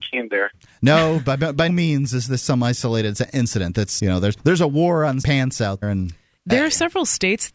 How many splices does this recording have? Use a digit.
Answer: 4